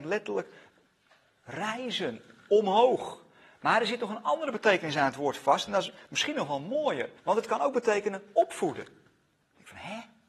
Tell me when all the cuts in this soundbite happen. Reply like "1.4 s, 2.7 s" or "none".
7.2 s